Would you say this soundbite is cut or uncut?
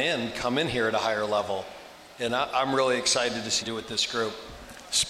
cut